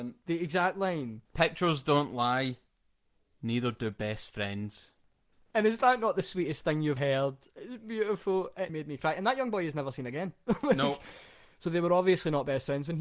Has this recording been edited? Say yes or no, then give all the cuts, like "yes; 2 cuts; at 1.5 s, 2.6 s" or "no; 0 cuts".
yes; 3 cuts; at 1.3 s, 7.0 s, 8.7 s